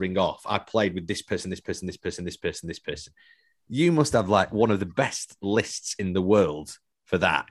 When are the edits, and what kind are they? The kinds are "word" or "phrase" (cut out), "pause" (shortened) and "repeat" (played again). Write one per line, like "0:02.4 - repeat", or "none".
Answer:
none